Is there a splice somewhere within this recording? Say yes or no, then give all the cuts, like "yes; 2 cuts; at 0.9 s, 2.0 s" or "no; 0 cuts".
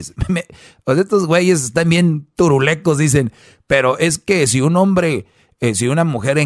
no; 0 cuts